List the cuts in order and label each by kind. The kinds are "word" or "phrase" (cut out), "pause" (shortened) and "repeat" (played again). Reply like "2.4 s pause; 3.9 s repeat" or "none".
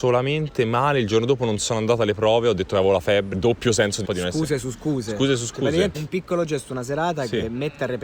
3.3 s word; 4.0 s word; 5.9 s word